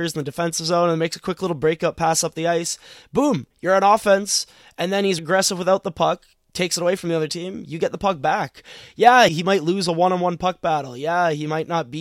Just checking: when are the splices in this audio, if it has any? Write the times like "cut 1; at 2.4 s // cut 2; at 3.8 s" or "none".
cut 1; at 5.2 s // cut 2; at 9.3 s